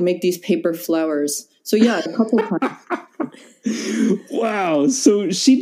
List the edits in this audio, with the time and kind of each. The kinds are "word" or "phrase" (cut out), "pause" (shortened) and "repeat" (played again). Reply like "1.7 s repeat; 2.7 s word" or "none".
2.1 s word